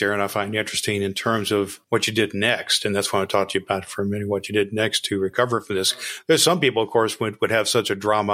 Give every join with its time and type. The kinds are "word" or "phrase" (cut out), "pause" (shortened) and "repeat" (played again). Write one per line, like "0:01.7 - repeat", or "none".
0:01.8 - pause